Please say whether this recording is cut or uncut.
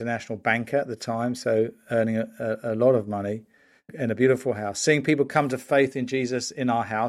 uncut